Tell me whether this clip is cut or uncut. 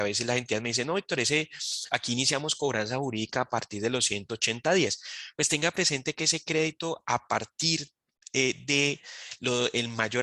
uncut